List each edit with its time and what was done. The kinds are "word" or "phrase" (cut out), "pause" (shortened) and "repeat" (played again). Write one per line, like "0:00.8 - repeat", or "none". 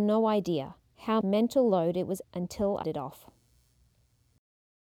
0:01.2 - word
0:02.2 - word
0:02.8 - word